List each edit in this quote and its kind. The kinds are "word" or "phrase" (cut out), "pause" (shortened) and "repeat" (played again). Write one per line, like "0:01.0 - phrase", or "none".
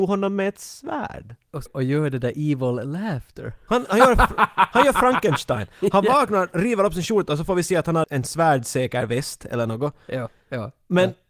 0:01.7 - phrase
0:03.9 - word
0:08.0 - word